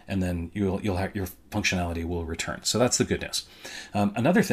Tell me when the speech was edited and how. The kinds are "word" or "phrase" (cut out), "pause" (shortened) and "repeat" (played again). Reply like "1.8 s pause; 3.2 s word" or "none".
none

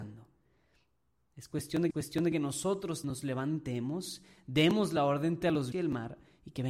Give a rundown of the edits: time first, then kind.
1.9 s repeat; 3.0 s word; 5.4 s word; 5.7 s word

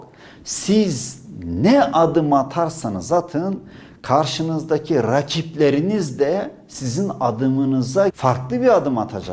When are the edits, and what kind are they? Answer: 8.1 s word

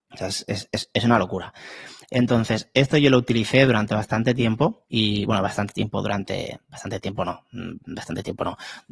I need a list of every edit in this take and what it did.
4.9 s pause

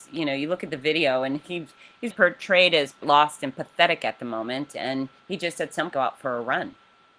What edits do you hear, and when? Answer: 2.1 s word; 3.0 s word; 5.2 s pause; 5.9 s phrase

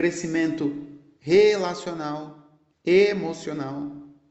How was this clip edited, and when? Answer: 2.7 s pause

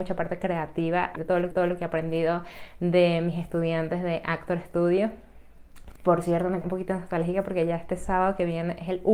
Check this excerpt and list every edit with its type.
1.2 s word; 1.5 s repeat; 6.6 s word

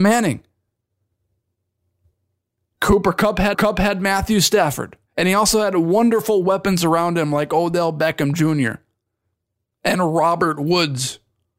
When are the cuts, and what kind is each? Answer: 3.5 s repeat; 5.1 s pause

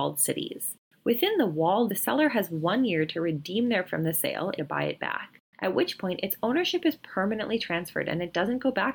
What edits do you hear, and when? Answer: 1.9 s word; 3.9 s word; 4.6 s word

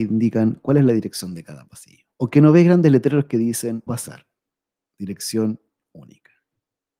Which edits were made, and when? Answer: 2.1 s pause; 3.9 s word

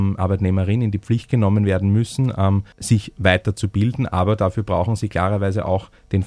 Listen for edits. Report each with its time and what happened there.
2.7 s pause

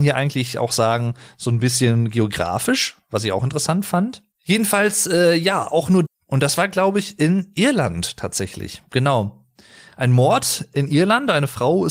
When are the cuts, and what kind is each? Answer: 6.1 s phrase

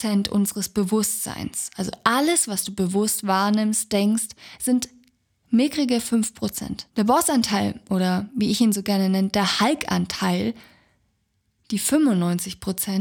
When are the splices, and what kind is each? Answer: 6.9 s pause

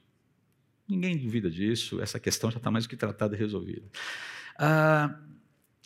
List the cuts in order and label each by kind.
none

